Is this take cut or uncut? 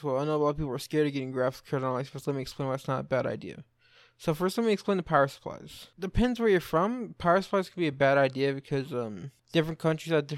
uncut